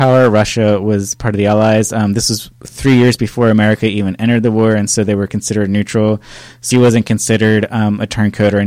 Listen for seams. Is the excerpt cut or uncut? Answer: cut